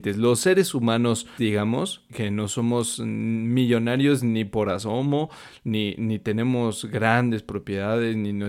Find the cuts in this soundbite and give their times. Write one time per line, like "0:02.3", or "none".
0:01.4
0:02.1